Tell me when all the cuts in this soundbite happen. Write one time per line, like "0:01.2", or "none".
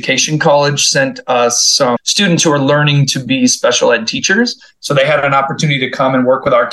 0:02.0